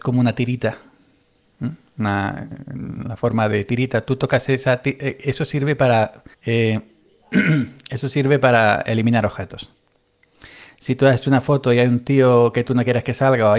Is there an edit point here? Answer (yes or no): yes